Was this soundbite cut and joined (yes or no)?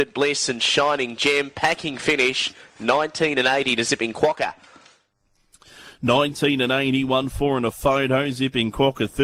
no